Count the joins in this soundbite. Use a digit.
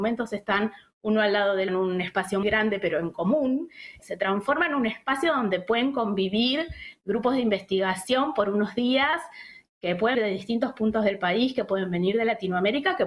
4